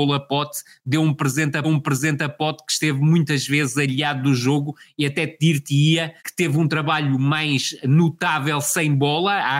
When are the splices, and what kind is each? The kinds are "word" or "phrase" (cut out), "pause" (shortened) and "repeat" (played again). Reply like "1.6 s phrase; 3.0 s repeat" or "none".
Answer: 1.6 s repeat; 6.2 s pause